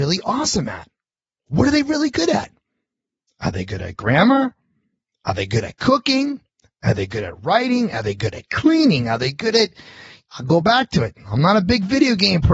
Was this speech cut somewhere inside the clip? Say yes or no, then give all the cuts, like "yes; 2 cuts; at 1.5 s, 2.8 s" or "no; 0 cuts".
no; 0 cuts